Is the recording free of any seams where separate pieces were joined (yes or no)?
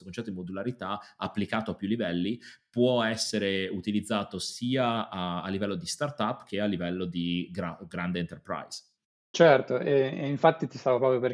yes